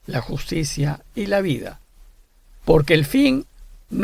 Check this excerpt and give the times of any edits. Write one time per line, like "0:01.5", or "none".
none